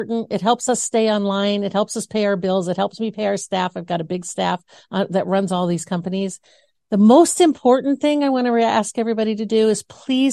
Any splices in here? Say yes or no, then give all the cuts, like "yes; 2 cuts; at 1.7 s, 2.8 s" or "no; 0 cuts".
no; 0 cuts